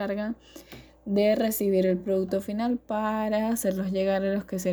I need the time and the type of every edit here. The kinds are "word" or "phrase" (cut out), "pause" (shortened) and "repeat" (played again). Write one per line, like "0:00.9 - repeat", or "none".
none